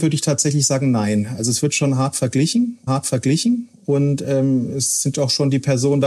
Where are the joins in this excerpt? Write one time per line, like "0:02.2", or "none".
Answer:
0:02.9